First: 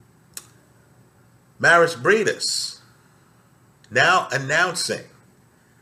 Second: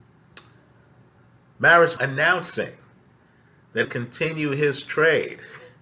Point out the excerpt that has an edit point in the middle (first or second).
second